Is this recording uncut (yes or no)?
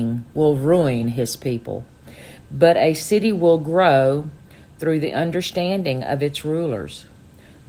yes